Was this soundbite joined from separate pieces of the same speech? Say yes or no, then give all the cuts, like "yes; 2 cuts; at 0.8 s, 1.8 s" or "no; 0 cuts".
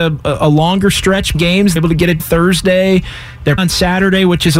yes; 4 cuts; at 1.3 s, 1.8 s, 2.2 s, 3.6 s